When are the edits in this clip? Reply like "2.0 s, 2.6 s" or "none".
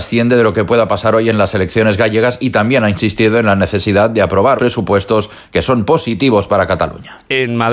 4.6 s